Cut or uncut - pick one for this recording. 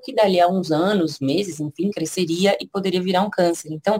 uncut